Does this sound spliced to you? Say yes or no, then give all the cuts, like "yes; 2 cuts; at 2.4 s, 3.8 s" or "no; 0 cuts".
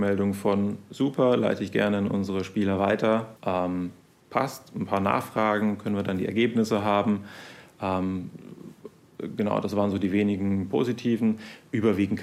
yes; 1 cut; at 3.4 s